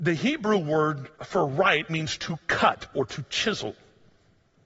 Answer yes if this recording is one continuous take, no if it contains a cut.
no